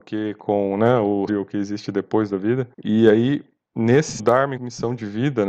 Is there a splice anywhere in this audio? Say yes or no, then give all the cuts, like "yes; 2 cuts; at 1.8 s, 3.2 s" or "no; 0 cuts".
yes; 4 cuts; at 1.3 s, 2.7 s, 4.2 s, 4.6 s